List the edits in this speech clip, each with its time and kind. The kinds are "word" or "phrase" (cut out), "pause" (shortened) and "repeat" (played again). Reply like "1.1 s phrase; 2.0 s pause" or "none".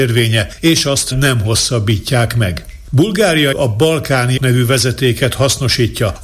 1.1 s phrase; 3.5 s word; 4.4 s word